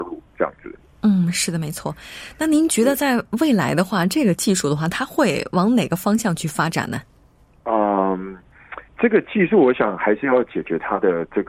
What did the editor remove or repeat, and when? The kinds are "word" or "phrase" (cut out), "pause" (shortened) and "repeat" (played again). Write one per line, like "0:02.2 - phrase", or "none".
0:08.9 - pause